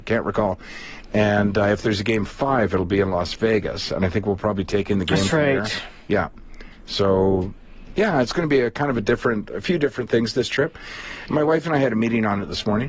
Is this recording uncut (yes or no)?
yes